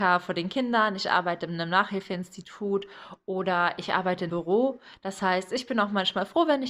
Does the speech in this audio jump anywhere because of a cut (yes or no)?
yes